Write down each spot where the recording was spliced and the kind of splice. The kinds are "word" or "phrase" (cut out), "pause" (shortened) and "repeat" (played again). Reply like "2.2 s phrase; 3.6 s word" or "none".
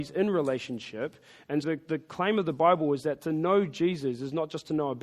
1.6 s word